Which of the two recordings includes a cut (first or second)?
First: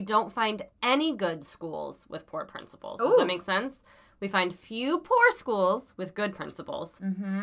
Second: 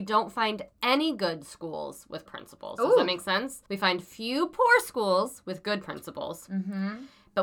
second